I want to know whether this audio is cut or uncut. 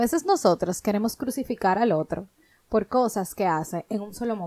uncut